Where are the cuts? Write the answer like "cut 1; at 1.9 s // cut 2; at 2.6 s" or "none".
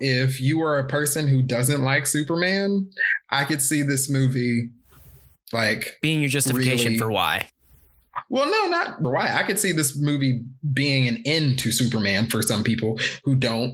cut 1; at 9.0 s